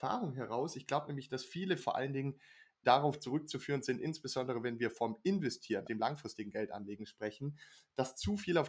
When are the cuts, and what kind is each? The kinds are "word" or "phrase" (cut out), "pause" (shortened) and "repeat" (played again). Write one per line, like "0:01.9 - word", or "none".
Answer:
0:01.8 - word
0:02.8 - word
0:05.8 - word